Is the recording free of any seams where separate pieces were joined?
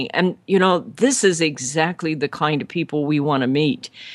yes; 0 cuts

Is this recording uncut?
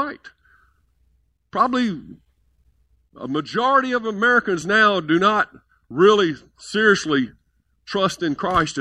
yes; 0 cuts

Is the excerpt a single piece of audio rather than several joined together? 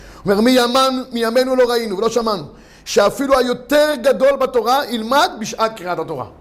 yes; 0 cuts

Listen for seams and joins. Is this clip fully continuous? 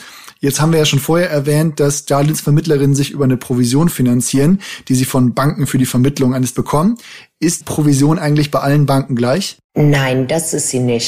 no; 2 cuts; at 6.5 s, 7.6 s

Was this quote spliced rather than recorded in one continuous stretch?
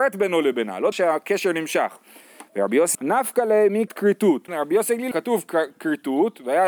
yes; 5 cuts; at 0.9 s, 2.9 s, 3.9 s, 4.5 s, 5.1 s

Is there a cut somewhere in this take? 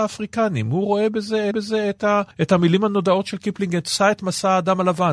yes; 2 cuts; at 1.5 s, 2.3 s

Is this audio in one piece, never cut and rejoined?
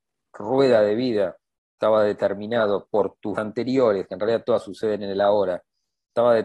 no; 1 cut; at 3.3 s

